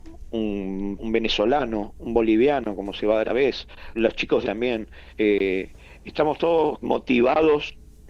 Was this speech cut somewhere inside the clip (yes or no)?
yes